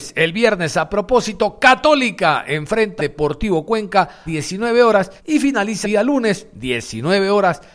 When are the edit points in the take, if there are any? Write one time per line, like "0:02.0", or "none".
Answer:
0:03.0
0:04.3
0:05.2
0:05.8